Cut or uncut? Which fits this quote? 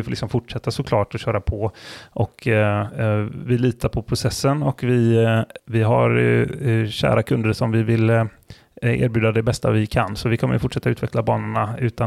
uncut